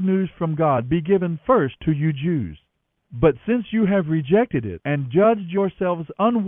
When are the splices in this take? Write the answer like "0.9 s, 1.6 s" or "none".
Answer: none